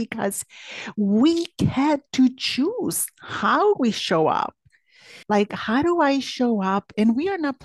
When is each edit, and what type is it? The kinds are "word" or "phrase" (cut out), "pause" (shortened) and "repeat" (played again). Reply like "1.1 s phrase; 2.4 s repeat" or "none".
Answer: 5.2 s pause